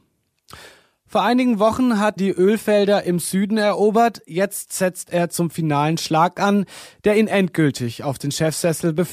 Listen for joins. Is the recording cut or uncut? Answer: cut